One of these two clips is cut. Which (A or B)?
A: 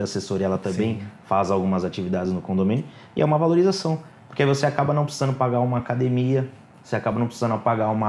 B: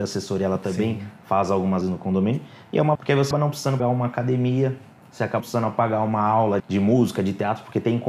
B